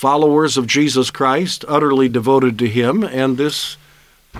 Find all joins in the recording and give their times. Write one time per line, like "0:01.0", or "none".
none